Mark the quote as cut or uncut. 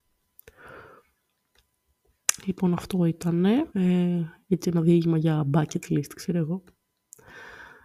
cut